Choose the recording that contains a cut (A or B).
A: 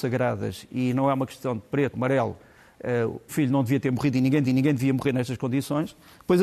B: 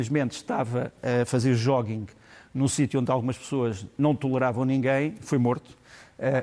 A